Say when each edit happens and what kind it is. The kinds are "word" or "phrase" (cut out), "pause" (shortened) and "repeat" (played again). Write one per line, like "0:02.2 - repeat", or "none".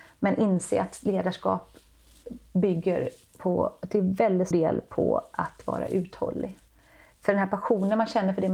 0:04.5 - word